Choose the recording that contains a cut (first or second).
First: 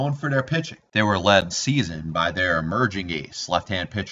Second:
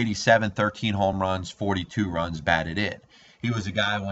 first